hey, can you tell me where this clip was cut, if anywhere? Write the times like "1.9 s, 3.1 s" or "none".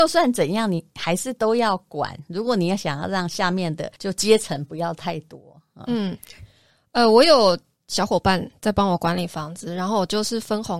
4.0 s